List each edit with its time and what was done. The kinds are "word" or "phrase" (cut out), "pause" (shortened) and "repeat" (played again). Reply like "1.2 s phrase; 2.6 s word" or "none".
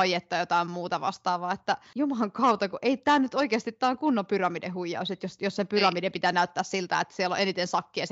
none